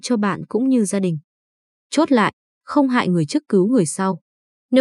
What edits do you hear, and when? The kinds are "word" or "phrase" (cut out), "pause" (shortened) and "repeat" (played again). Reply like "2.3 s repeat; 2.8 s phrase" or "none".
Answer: none